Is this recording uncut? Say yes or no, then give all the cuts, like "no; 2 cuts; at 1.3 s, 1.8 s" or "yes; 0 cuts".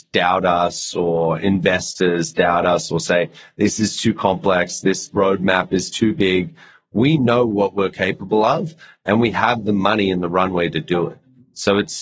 yes; 0 cuts